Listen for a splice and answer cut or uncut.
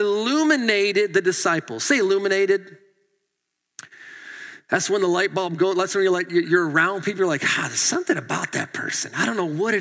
cut